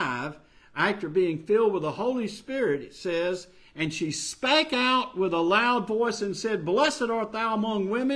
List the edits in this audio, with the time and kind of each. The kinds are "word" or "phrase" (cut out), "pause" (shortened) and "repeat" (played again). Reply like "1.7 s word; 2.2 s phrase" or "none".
none